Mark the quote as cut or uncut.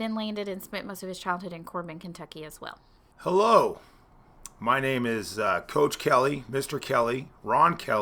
uncut